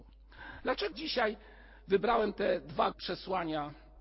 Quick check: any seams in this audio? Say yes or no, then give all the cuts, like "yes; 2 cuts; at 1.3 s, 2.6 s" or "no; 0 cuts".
yes; 2 cuts; at 0.9 s, 2.9 s